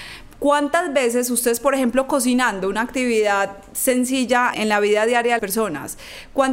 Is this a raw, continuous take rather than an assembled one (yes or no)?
no